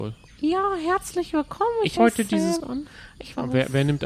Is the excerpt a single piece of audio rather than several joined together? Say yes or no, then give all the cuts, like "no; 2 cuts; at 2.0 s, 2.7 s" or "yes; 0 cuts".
no; 2 cuts; at 2.0 s, 2.6 s